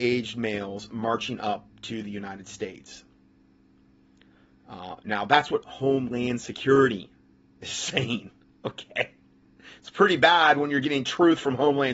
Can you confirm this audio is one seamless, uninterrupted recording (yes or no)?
yes